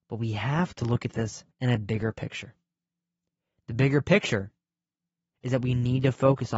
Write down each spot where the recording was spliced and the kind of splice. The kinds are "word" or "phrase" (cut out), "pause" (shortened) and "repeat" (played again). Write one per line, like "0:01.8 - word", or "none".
0:01.5 - pause